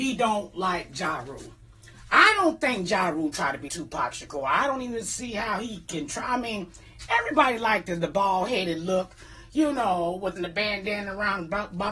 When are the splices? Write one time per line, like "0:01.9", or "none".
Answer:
0:03.7
0:10.4